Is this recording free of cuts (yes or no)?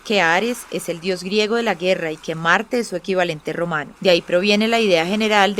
no